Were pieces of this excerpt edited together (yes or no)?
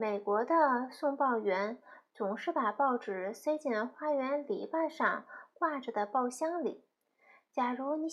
no